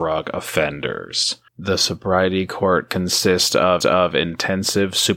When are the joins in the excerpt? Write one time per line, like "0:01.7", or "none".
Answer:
0:01.5
0:03.8